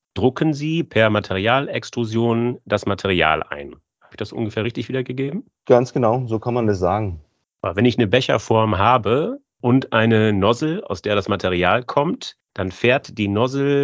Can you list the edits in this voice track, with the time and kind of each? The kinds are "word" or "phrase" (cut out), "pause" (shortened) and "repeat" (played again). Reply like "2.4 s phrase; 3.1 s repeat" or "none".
none